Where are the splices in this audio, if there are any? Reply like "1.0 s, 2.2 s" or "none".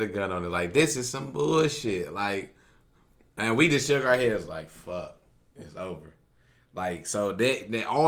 none